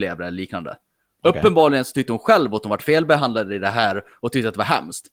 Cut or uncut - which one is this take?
uncut